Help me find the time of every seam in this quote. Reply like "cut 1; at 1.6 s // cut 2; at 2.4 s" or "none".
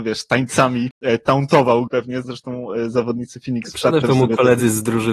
cut 1; at 1.9 s // cut 2; at 2.2 s // cut 3; at 4.0 s